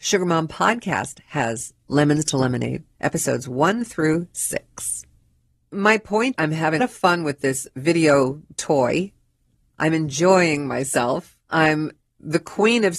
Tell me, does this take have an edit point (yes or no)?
yes